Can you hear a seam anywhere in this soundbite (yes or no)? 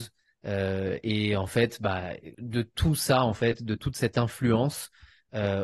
yes